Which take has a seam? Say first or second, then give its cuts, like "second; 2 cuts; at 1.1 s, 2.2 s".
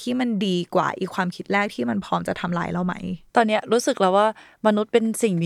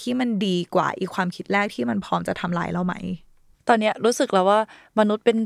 first; 1 cut; at 3.3 s